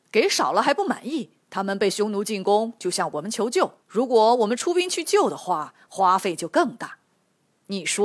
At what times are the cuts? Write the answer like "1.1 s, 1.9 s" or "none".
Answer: 1.4 s, 3.8 s